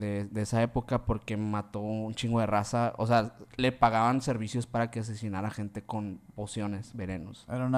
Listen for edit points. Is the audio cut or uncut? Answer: uncut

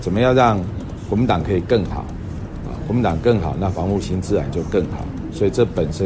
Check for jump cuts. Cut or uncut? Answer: uncut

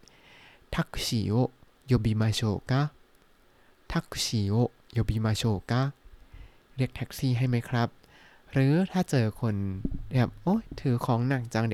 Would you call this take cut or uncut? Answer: uncut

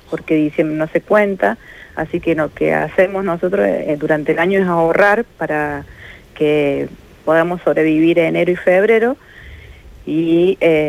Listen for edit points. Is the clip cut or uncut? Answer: uncut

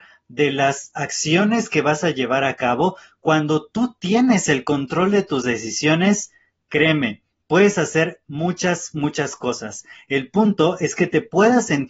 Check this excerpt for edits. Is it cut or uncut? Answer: uncut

